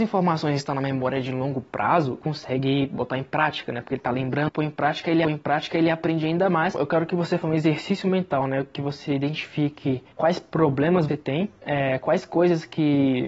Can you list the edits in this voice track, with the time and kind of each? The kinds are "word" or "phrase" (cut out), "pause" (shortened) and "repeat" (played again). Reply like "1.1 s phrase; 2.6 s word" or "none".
2.2 s word; 4.5 s word; 5.2 s repeat; 7.4 s word; 10.1 s pause; 11.1 s word